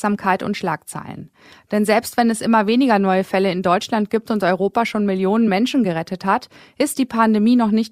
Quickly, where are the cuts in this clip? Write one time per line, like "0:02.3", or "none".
none